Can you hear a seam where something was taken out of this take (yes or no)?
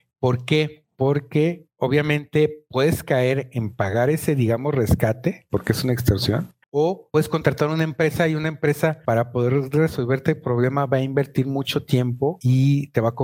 yes